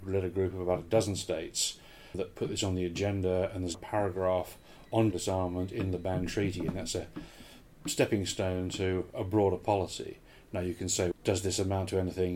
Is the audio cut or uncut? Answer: cut